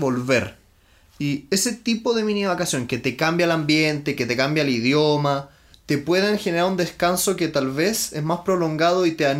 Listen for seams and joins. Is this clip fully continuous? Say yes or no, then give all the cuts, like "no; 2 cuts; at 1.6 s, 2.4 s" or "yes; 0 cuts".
no; 1 cut; at 5.7 s